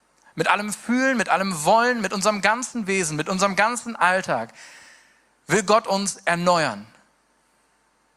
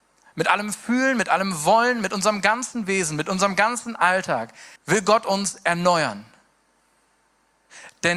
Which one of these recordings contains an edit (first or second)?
second